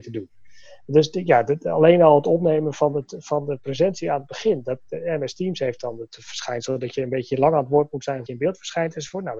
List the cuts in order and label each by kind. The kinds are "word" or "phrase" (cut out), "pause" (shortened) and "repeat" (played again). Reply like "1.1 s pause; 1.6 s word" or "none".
8.3 s word